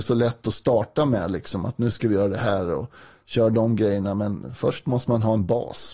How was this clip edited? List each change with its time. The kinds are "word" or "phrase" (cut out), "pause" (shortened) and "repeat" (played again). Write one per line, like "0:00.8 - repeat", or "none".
none